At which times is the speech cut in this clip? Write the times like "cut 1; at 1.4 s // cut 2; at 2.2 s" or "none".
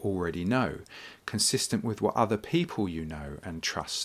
none